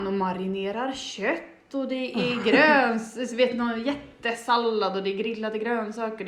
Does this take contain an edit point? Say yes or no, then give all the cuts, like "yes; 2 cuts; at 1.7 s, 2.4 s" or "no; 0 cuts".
no; 0 cuts